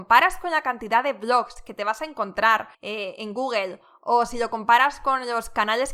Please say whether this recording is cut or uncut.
cut